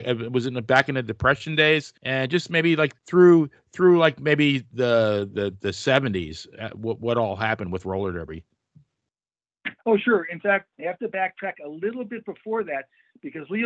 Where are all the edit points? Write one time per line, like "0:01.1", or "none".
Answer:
0:02.0
0:03.0
0:09.8
0:10.7